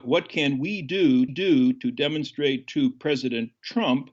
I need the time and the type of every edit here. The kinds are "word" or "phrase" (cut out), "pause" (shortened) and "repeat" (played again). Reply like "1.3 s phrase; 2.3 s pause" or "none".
1.3 s repeat